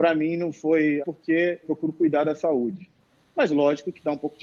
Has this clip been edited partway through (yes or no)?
yes